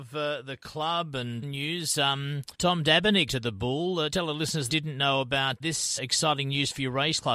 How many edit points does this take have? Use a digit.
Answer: 7